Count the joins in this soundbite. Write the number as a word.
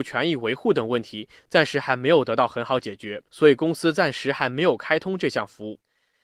one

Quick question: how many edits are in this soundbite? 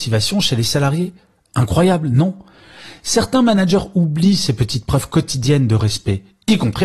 zero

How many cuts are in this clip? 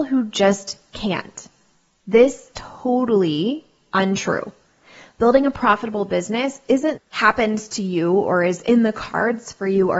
two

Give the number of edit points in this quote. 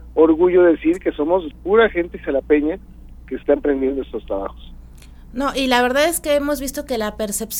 one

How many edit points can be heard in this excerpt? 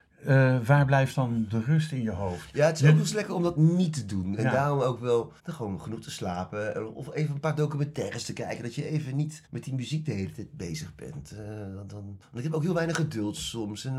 three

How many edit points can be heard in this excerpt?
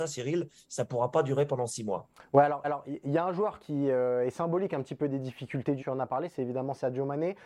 two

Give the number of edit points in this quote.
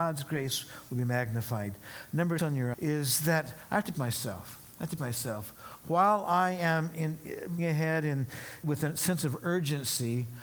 six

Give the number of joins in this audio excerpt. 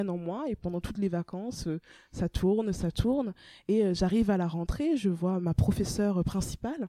zero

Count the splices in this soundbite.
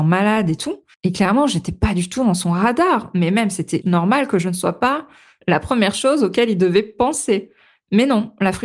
two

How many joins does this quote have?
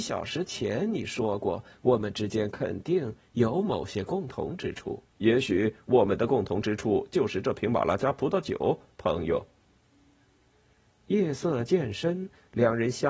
one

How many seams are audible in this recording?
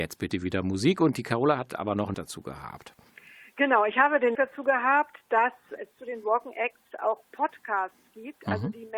three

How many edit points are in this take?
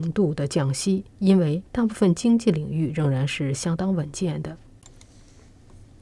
two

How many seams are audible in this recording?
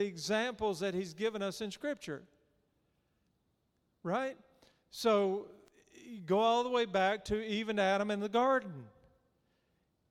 zero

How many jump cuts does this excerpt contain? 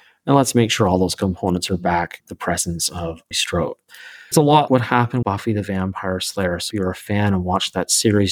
six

